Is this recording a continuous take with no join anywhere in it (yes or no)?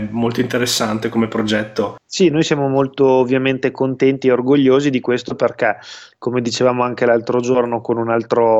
yes